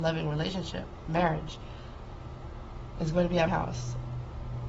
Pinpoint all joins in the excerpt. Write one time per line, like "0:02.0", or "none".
0:03.5